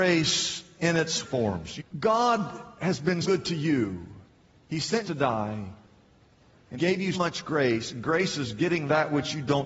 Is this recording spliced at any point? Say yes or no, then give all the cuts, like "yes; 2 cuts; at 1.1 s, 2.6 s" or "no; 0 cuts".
yes; 6 cuts; at 1.2 s, 1.8 s, 3.2 s, 5.0 s, 6.7 s, 7.1 s